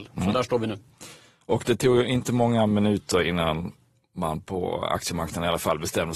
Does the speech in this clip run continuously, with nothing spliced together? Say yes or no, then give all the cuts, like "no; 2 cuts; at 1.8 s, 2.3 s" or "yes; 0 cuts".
yes; 0 cuts